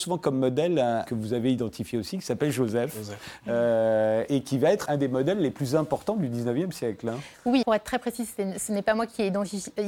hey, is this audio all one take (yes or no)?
no